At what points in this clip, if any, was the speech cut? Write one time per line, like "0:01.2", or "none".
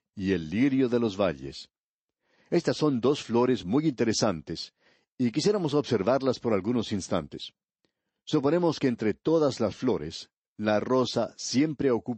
none